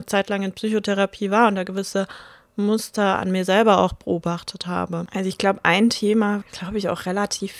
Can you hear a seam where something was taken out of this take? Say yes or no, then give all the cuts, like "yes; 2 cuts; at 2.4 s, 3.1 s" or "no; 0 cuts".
yes; 1 cut; at 6.4 s